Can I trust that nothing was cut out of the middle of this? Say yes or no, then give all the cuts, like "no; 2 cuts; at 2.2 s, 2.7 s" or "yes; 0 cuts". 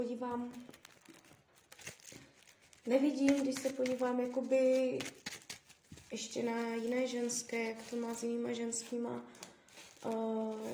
yes; 0 cuts